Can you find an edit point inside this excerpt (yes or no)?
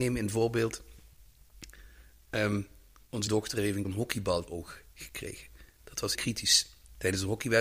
yes